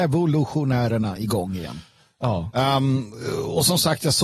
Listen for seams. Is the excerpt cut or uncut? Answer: uncut